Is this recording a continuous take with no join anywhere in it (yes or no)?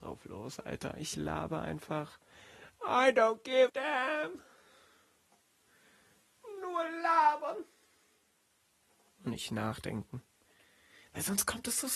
no